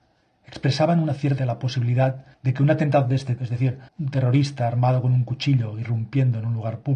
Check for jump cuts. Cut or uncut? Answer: cut